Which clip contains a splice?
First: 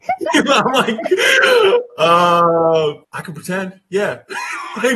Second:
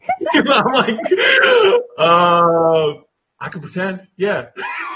first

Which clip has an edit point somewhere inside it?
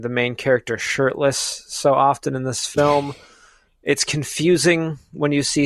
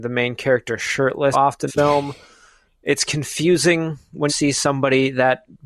second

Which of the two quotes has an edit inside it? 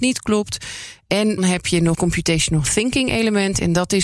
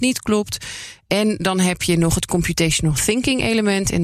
first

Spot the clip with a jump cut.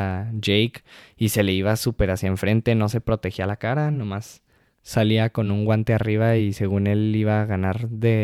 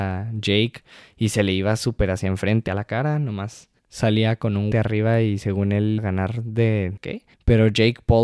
second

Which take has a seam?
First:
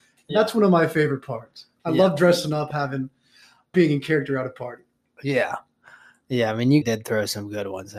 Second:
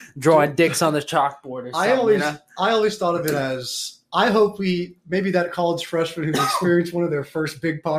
first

